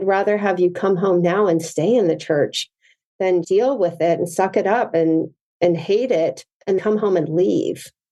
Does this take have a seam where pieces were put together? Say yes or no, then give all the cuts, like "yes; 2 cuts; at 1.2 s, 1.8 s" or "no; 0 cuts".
yes; 2 cuts; at 3.4 s, 6.8 s